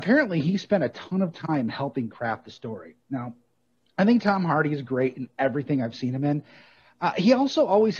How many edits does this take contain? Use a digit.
0